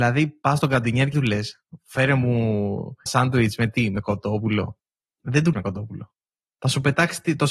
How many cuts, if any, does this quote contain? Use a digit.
3